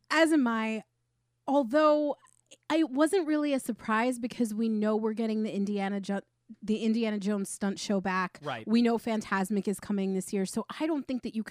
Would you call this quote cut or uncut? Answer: uncut